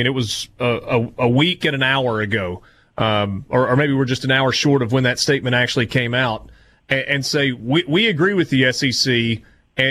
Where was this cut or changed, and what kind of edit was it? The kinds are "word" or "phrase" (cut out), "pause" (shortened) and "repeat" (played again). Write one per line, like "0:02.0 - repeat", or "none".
none